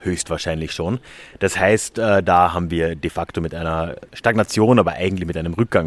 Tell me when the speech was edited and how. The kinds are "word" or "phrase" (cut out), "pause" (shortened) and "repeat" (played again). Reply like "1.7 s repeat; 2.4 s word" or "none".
4.1 s pause